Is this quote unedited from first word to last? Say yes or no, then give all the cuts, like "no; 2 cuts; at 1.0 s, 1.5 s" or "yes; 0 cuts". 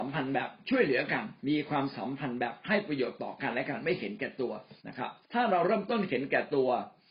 no; 3 cuts; at 1.4 s, 4.8 s, 5.2 s